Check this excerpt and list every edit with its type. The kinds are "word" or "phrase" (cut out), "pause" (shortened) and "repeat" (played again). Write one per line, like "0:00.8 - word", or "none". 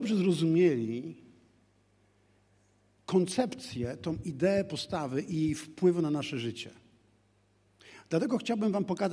none